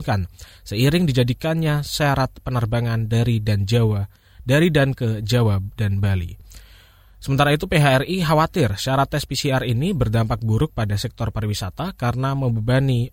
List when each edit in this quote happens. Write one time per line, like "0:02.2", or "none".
none